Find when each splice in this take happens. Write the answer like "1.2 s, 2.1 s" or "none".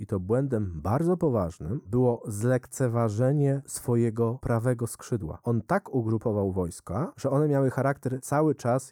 none